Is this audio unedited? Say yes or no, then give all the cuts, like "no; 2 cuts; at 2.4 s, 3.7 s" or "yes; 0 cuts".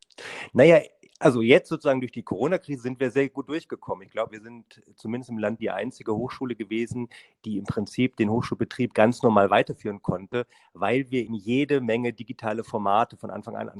no; 3 cuts; at 4.3 s, 5.6 s, 11.3 s